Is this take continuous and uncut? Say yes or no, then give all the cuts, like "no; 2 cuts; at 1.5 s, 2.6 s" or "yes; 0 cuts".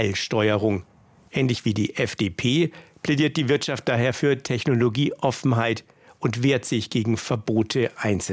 yes; 0 cuts